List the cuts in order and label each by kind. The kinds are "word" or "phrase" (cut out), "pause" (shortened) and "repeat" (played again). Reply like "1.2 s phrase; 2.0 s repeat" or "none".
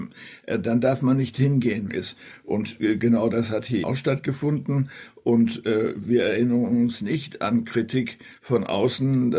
1.9 s phrase; 3.8 s word

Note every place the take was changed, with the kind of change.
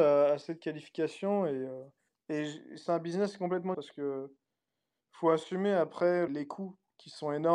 2.1 s pause; 2.9 s word; 3.7 s word; 6.3 s word

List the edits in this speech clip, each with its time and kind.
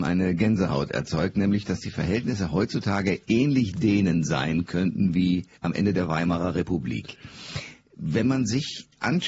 5.6 s pause

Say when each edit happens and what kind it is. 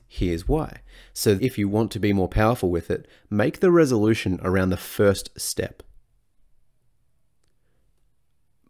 1.4 s word

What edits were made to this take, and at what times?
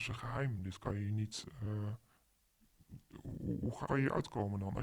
3.9 s word

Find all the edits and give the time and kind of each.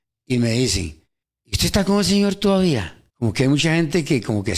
1.2 s pause; 3.1 s pause

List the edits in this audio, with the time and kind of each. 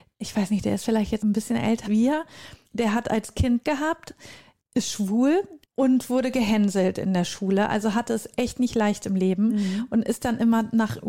1.2 s word; 1.8 s word; 2.6 s pause; 3.6 s word; 5.6 s pause

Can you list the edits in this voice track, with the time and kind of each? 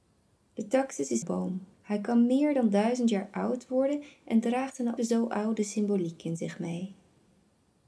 1.2 s phrase; 1.7 s pause; 5.0 s word

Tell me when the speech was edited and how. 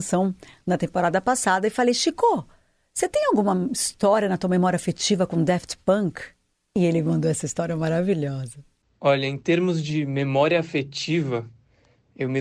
none

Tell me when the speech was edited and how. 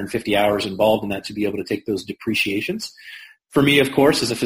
none

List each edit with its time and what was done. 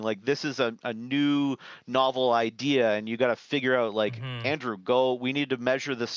none

